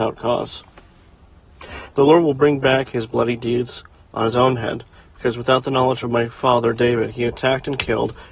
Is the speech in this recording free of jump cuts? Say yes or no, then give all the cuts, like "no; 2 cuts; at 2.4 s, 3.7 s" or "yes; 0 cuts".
yes; 0 cuts